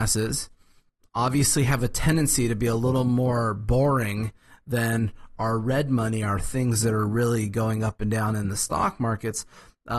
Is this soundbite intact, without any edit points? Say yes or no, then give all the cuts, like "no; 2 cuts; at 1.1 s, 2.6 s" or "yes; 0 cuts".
yes; 0 cuts